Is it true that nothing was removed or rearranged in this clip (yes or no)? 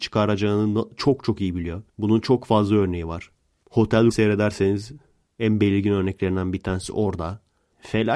no